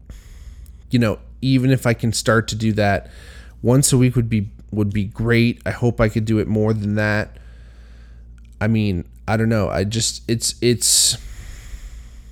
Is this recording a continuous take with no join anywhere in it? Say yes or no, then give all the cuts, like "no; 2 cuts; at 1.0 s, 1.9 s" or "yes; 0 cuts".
yes; 0 cuts